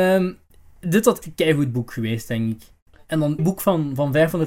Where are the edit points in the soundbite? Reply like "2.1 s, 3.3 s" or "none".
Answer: 1.2 s, 3.4 s